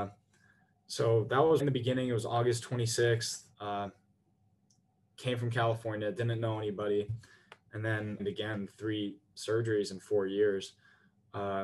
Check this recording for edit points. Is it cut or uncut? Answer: cut